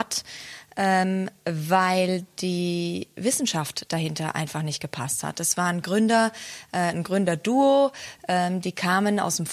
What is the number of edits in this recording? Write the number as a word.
zero